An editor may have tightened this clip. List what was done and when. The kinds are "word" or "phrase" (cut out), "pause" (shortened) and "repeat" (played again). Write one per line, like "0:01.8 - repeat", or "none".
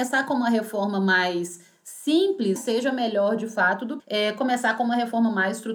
0:02.6 - word
0:04.0 - word